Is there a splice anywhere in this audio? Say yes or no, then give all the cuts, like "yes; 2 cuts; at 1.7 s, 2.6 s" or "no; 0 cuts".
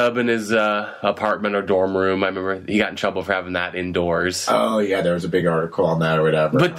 no; 0 cuts